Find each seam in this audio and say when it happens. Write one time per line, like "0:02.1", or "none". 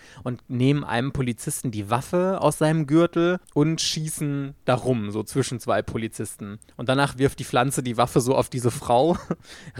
0:03.4